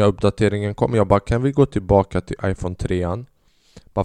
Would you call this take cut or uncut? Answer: uncut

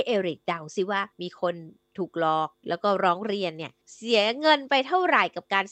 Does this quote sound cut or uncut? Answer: cut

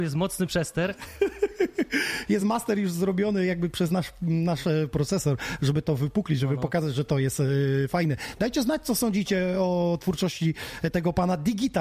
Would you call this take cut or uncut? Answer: uncut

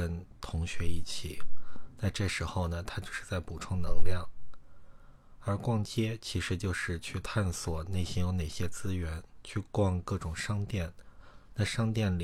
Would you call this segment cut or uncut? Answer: uncut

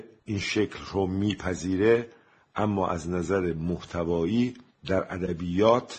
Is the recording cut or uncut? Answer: uncut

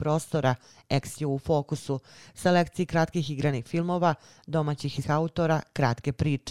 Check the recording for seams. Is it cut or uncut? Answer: cut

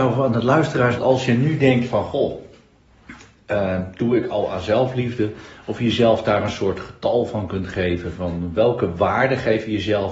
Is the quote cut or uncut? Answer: cut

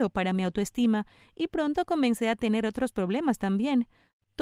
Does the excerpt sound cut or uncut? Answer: uncut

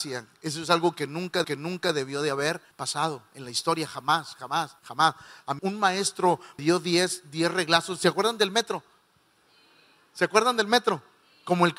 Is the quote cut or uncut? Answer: cut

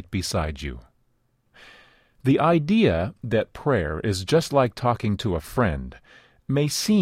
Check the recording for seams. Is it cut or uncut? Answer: uncut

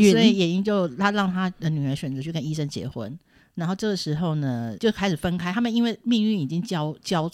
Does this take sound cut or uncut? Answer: cut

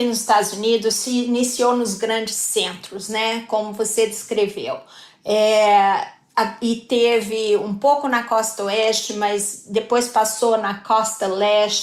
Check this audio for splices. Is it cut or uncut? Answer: uncut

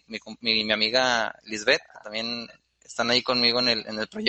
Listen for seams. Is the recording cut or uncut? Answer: uncut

